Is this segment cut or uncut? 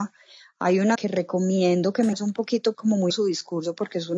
cut